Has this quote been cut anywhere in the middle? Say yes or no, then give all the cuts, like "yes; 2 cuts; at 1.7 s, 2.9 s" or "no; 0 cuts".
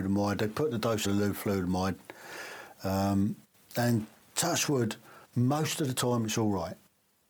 yes; 3 cuts; at 1.0 s, 3.5 s, 5.2 s